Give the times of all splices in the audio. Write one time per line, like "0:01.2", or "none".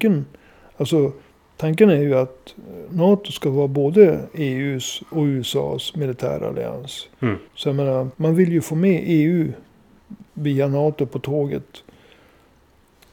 0:07.5
0:08.1
0:10.3